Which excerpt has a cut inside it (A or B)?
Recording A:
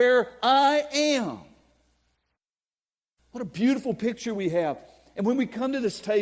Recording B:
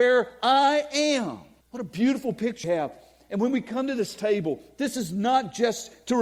B